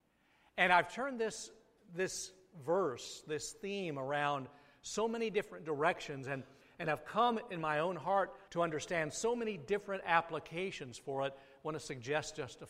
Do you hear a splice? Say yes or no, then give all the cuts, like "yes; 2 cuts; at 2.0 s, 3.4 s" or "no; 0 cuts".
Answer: yes; 1 cut; at 8.5 s